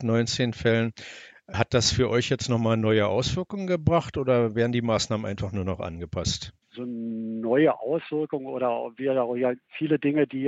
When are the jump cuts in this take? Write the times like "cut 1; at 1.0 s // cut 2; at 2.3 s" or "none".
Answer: cut 1; at 6.6 s